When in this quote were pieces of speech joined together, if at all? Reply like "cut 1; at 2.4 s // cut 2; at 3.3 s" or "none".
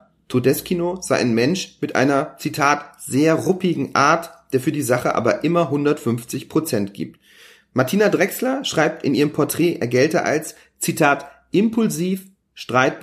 none